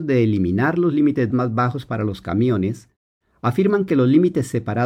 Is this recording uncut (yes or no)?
no